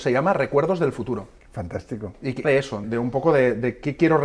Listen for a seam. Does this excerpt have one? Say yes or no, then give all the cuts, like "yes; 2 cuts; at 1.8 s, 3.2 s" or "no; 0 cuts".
yes; 2 cuts; at 2.4 s, 2.8 s